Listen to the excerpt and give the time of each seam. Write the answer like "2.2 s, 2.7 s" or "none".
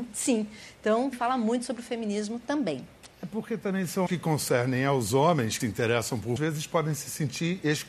1.1 s, 3.1 s, 4.1 s, 5.6 s, 6.4 s